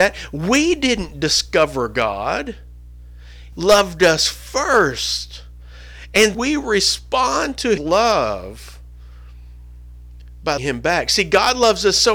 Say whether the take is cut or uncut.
cut